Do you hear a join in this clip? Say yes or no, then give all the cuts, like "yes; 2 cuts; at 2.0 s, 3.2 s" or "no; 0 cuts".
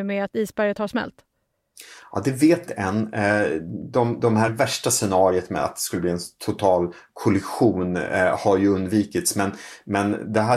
yes; 2 cuts; at 2.7 s, 4.5 s